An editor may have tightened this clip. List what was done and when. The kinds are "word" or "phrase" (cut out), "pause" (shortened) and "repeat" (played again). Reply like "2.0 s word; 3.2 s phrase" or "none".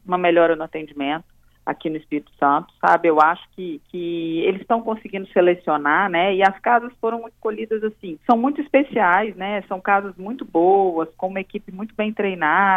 3.9 s pause; 8.2 s pause